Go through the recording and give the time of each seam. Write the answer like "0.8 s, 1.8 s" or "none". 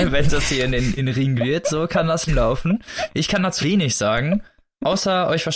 1.0 s, 1.4 s, 2.3 s, 3.6 s